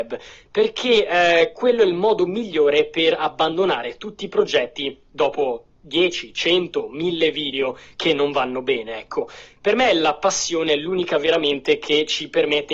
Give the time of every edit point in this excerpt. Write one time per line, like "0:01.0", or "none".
none